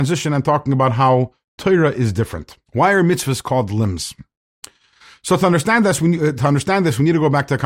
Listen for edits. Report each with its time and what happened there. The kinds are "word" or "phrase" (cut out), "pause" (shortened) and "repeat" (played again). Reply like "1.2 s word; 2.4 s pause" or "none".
2.7 s pause